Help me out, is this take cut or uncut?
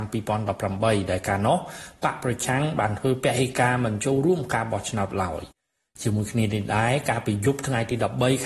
uncut